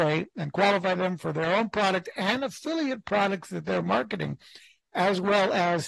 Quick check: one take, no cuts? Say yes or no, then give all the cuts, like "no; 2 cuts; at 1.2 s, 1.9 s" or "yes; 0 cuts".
yes; 0 cuts